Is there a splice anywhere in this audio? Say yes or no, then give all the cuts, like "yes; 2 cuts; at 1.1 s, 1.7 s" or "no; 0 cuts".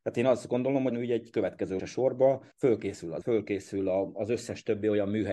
yes; 4 cuts; at 0.9 s, 1.8 s, 2.5 s, 3.2 s